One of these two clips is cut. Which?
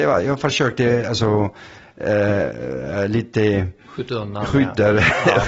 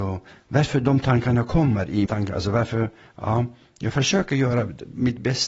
second; 1 cut; at 2.1 s

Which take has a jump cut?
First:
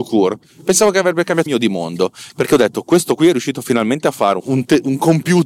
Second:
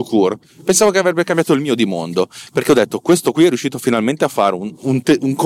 first; 2 cuts; at 1.5 s, 4.4 s

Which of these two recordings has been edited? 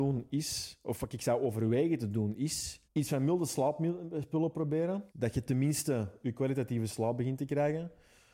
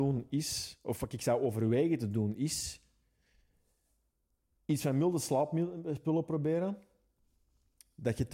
first; 2 cuts; at 2.8 s, 5.1 s

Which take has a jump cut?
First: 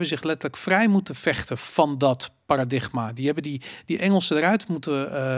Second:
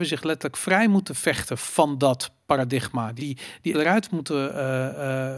second; 2 cuts; at 3.2 s, 3.7 s

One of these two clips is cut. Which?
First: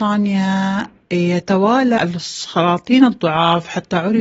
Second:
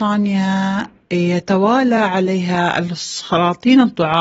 first; 1 cut; at 2.0 s

